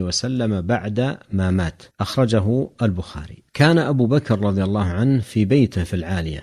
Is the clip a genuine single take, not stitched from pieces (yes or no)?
no